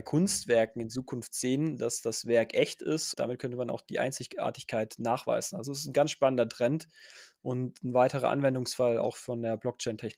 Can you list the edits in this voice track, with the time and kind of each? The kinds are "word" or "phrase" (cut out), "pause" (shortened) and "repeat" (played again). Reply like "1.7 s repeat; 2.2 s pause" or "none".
3.1 s word